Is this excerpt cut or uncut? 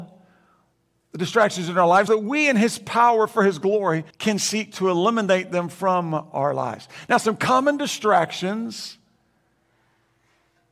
cut